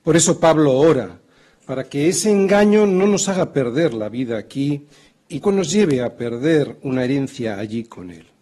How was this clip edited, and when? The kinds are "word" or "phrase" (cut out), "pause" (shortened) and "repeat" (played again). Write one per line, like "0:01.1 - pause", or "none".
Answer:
0:05.4 - word